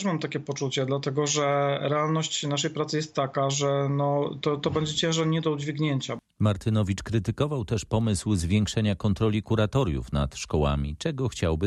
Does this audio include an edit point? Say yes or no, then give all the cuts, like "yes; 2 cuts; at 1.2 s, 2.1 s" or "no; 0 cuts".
no; 0 cuts